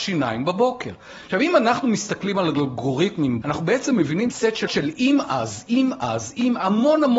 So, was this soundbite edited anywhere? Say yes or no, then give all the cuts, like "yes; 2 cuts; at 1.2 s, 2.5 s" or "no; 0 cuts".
yes; 3 cuts; at 3.4 s, 4.3 s, 4.7 s